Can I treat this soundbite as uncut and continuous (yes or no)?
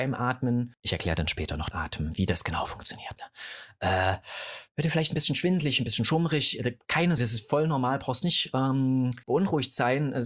no